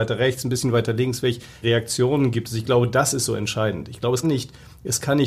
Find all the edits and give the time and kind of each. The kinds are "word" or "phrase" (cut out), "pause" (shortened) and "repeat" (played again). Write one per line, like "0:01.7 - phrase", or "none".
0:01.6 - word
0:04.2 - word